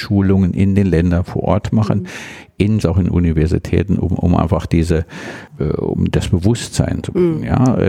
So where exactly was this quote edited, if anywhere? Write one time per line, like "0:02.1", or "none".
0:02.8